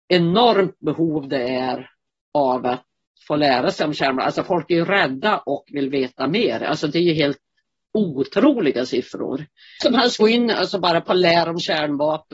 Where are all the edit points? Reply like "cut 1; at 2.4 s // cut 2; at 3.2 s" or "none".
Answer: cut 1; at 10.2 s